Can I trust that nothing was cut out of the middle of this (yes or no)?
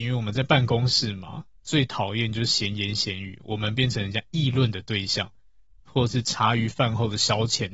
yes